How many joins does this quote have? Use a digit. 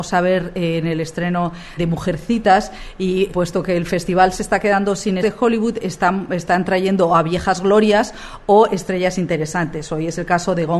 3